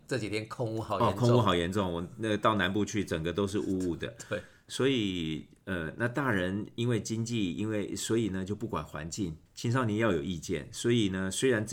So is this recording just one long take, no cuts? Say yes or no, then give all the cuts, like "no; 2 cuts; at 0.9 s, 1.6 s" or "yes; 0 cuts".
no; 1 cut; at 9.5 s